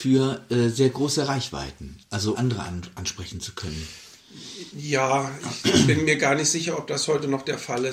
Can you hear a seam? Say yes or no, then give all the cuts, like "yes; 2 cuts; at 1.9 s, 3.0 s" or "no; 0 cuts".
yes; 1 cut; at 2.3 s